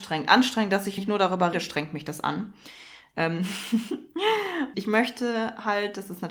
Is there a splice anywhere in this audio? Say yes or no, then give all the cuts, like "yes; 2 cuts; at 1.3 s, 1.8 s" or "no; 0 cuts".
yes; 3 cuts; at 1.0 s, 1.5 s, 4.7 s